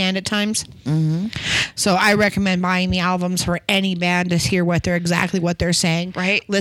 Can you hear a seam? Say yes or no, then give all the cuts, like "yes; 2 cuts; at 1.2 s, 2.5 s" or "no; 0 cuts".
no; 0 cuts